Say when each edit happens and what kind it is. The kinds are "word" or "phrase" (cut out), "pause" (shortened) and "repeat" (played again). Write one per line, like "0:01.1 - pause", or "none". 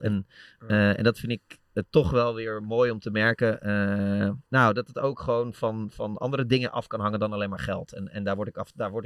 0:04.5 - pause